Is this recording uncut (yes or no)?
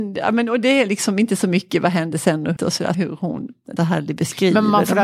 no